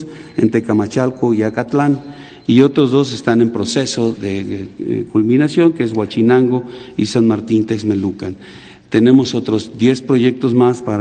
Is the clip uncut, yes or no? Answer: no